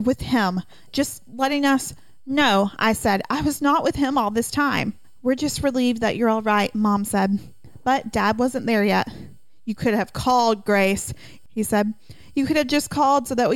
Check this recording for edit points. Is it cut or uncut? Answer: uncut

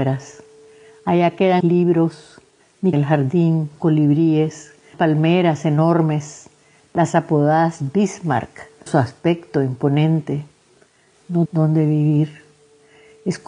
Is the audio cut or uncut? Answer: cut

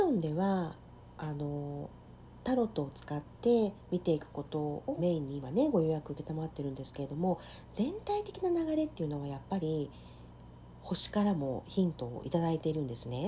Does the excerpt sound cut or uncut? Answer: cut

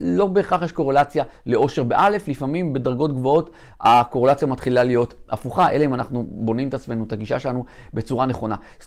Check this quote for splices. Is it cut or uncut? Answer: uncut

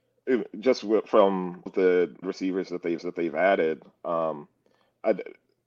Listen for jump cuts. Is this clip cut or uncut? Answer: cut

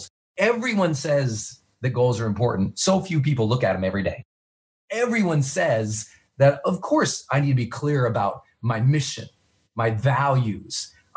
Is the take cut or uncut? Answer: uncut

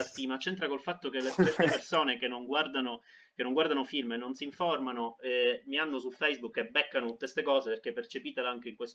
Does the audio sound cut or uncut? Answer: uncut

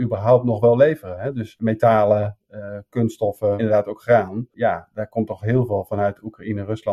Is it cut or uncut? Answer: cut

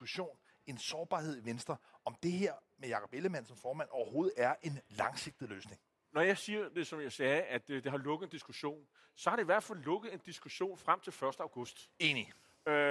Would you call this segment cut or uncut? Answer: uncut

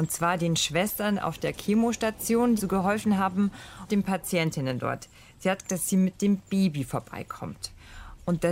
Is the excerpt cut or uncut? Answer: cut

